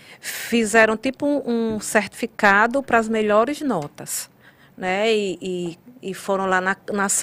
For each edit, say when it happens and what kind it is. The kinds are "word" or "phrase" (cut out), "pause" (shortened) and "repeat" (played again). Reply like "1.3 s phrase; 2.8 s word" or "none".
none